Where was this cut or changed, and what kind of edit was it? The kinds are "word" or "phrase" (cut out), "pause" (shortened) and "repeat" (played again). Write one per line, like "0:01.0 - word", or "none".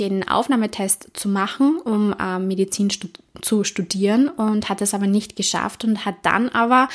none